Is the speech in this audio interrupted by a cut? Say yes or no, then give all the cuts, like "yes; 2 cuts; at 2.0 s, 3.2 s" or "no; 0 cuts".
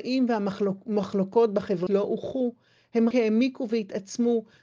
yes; 2 cuts; at 1.9 s, 3.1 s